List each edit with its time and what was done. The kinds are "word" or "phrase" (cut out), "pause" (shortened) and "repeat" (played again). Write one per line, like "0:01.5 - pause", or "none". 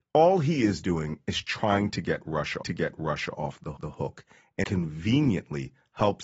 0:02.6 - repeat
0:03.8 - repeat
0:04.6 - word